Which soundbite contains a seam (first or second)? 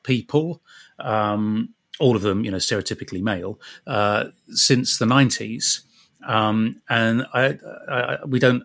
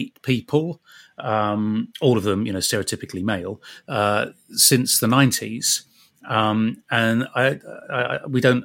second